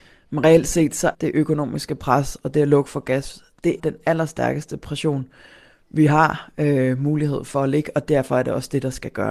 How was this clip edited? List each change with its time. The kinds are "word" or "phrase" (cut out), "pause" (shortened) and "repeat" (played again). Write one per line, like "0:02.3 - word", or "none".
0:01.1 - word
0:03.8 - word